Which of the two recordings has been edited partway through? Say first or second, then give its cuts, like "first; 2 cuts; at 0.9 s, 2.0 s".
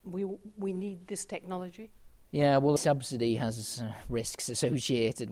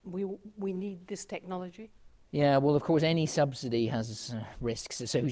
first; 1 cut; at 2.8 s